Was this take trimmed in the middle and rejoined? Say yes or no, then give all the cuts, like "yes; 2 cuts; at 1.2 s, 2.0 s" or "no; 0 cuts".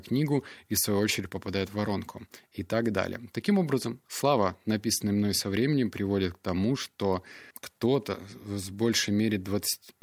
yes; 1 cut; at 7.5 s